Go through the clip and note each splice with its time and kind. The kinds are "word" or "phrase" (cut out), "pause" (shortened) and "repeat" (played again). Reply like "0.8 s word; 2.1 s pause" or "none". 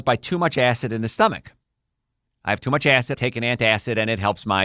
3.1 s word